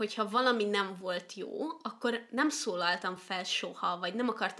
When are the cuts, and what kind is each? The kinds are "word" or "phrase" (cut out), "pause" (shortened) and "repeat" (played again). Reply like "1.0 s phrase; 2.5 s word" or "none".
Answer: none